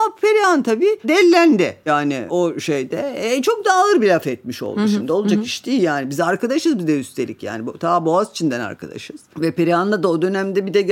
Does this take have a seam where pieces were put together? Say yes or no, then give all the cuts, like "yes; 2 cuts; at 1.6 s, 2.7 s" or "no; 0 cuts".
no; 0 cuts